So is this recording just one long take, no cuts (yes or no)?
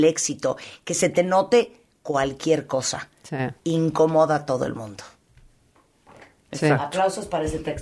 yes